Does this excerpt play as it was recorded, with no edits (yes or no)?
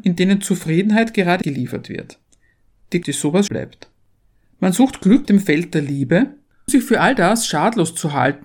no